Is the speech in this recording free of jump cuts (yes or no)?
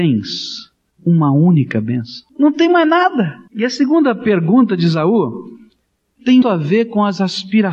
no